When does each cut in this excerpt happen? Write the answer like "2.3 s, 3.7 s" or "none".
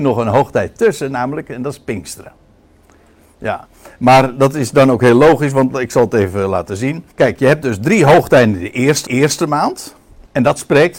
7.1 s, 9.1 s